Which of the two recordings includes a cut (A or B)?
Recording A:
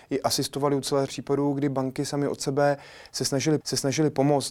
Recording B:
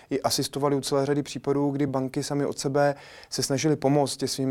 A